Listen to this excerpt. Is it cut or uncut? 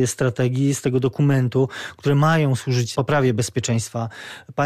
cut